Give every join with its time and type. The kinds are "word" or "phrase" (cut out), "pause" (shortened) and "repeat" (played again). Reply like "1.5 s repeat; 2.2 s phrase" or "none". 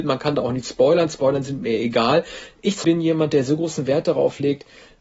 2.8 s word